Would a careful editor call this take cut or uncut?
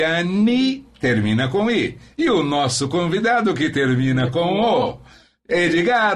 uncut